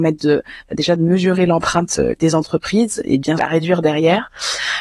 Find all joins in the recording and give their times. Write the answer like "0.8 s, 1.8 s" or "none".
2.2 s, 3.4 s